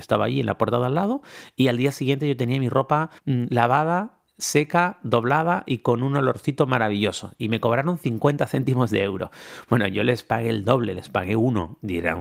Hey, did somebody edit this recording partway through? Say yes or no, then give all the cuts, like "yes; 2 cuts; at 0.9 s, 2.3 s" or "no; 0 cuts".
yes; 1 cut; at 3.2 s